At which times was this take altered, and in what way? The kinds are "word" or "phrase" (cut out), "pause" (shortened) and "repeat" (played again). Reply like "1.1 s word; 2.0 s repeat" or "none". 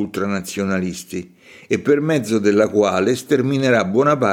none